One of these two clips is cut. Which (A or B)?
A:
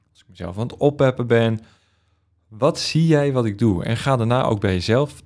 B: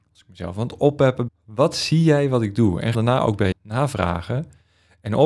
B